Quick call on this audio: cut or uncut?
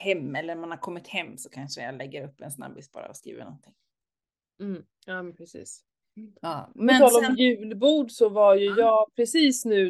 uncut